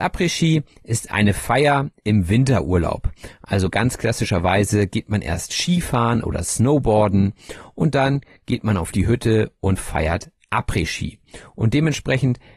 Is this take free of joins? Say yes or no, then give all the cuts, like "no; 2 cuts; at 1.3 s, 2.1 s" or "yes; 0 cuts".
yes; 0 cuts